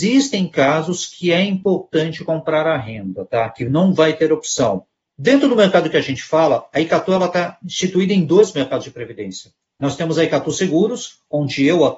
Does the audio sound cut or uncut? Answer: cut